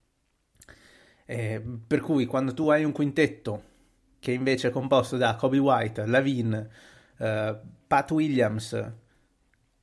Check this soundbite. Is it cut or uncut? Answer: uncut